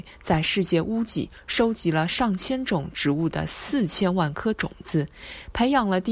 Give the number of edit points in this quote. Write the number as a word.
zero